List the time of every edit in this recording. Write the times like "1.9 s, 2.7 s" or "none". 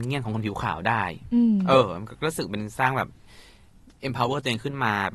none

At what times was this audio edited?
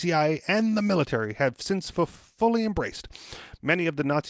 none

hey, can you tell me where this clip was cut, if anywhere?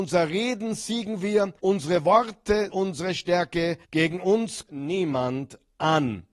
1.6 s, 2.7 s, 3.8 s, 4.7 s

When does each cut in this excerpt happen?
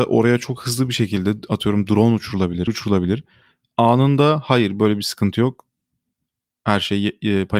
2.7 s

